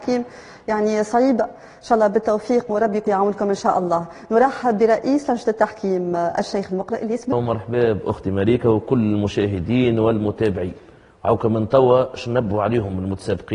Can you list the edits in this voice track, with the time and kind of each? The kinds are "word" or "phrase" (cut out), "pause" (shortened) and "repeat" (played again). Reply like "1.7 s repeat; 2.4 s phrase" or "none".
2.7 s word; 3.1 s word; 7.3 s phrase